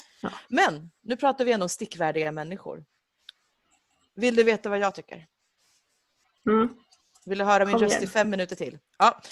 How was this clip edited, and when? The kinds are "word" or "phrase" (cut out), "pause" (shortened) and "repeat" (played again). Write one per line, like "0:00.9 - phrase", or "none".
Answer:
none